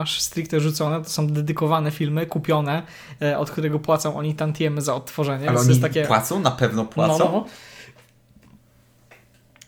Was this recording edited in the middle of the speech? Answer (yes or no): no